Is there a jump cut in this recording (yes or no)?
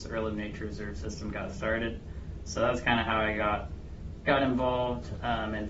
no